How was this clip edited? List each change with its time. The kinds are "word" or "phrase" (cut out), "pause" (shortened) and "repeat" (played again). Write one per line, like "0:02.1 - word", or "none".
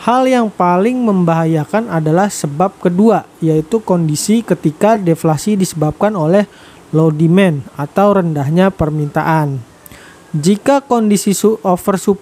none